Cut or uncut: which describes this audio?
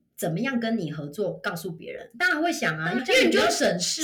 cut